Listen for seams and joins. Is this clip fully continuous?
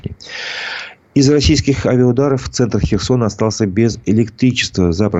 yes; 0 cuts

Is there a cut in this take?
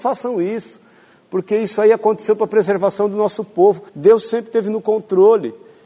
yes; 1 cut; at 3.9 s

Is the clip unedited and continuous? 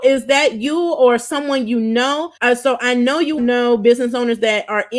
no; 2 cuts; at 2.4 s, 3.4 s

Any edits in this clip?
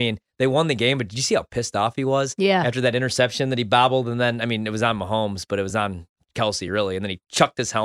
no; 0 cuts

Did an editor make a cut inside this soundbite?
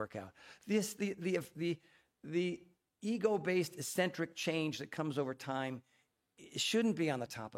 no; 0 cuts

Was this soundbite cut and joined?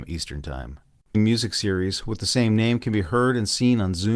yes; 1 cut; at 1.1 s

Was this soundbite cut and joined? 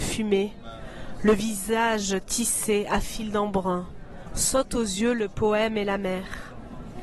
no; 0 cuts

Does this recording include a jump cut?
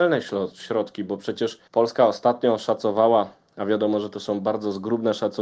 yes; 1 cut; at 1.7 s

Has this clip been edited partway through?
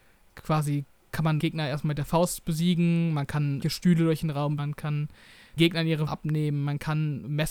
yes; 5 cuts; at 1.4 s, 3.6 s, 4.6 s, 5.6 s, 6.1 s

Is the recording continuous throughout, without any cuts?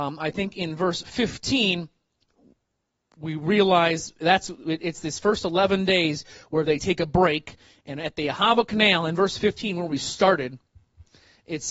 yes; 0 cuts

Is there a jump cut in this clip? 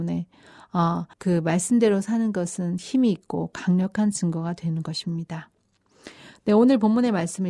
yes; 1 cut; at 1.1 s

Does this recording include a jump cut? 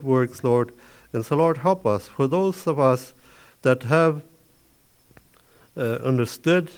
no; 0 cuts

